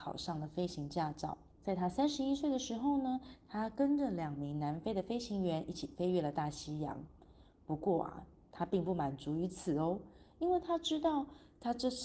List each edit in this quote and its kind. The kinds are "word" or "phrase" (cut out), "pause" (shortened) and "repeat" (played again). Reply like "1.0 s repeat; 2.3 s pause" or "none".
1.5 s pause

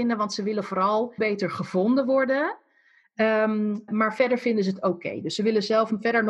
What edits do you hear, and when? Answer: 1.2 s word; 3.9 s word

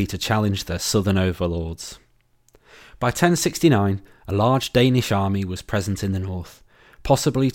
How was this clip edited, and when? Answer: none

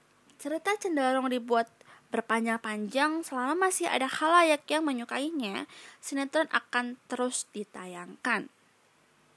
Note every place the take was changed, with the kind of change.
none

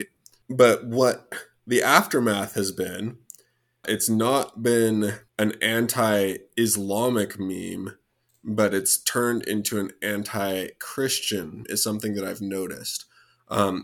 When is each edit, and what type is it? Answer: 5.3 s pause; 11.6 s word

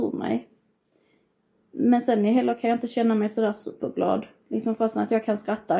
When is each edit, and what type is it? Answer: none

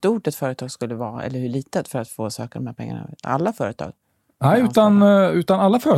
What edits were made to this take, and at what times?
none

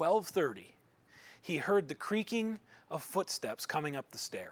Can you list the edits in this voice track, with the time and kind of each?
none

